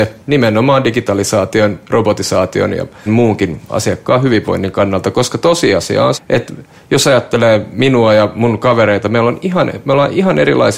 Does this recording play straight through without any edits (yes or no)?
no